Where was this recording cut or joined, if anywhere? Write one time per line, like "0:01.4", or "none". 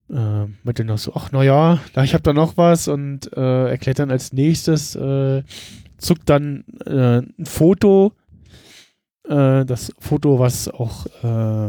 none